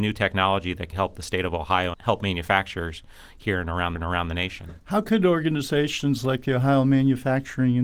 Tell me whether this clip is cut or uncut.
cut